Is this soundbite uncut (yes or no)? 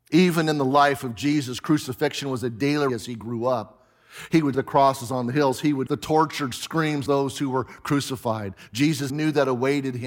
no